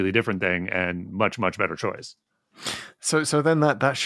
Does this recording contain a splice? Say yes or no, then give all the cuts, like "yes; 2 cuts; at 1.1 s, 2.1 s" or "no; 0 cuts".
no; 0 cuts